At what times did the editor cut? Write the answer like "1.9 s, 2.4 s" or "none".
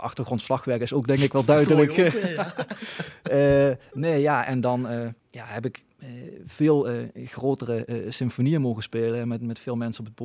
5.2 s